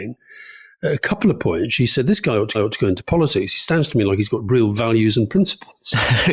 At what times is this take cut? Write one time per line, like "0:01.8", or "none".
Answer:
0:02.5